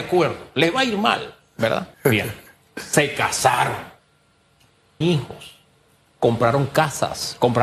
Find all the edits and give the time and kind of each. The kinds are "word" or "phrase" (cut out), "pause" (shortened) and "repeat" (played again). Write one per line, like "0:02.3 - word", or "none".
0:01.9 - pause
0:05.0 - word